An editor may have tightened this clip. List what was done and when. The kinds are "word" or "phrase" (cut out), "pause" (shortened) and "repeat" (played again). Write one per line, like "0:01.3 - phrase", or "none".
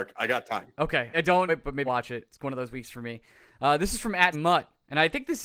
0:01.1 - word
0:01.5 - word
0:01.9 - word
0:04.3 - word